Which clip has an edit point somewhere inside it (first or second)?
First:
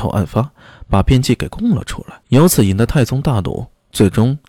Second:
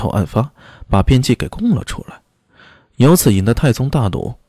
first